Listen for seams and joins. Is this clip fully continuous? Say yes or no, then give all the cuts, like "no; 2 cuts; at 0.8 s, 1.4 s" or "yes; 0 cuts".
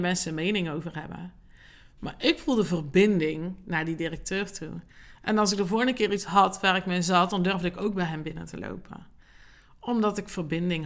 yes; 0 cuts